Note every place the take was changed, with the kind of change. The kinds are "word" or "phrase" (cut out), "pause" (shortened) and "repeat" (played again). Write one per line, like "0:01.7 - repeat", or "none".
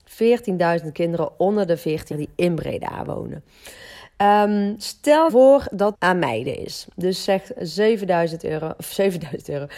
0:02.1 - word
0:05.3 - word
0:05.9 - phrase